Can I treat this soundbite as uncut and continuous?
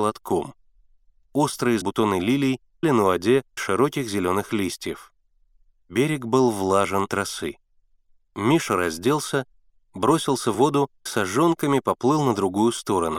no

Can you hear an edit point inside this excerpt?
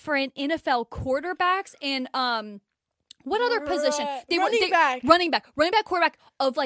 no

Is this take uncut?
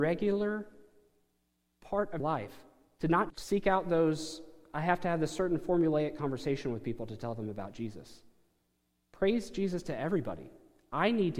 no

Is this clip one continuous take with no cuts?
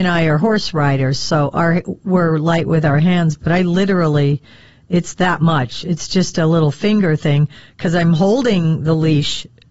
yes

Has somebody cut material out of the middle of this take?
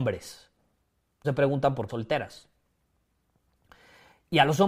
yes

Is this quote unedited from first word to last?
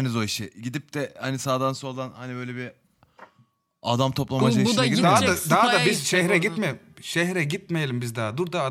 yes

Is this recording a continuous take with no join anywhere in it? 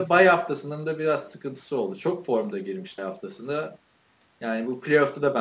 no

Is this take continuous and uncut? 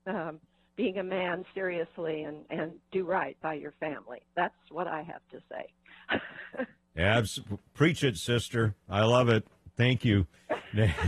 yes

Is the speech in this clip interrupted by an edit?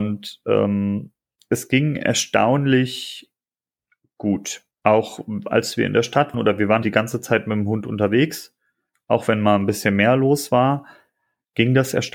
yes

